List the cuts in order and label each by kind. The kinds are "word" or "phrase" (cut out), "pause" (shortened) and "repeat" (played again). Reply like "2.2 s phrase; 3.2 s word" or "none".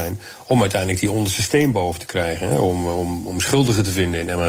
none